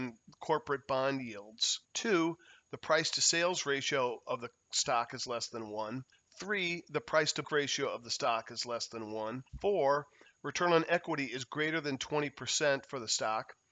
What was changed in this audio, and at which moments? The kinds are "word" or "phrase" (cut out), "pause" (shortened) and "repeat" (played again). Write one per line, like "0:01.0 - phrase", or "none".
0:01.8 - pause
0:06.1 - pause
0:07.4 - word
0:09.5 - pause